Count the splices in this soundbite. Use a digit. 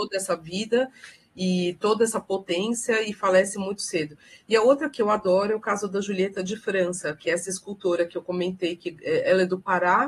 0